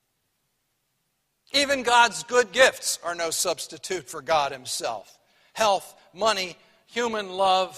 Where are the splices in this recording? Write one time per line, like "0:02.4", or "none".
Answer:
none